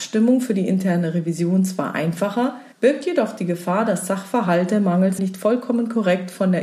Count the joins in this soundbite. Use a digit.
2